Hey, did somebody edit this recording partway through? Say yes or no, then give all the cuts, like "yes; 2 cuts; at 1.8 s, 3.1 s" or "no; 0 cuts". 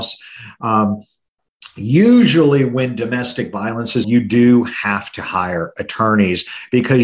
yes; 1 cut; at 4.0 s